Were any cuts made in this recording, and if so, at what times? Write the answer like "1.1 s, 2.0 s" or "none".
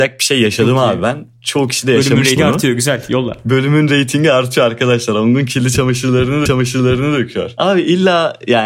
2.4 s, 6.5 s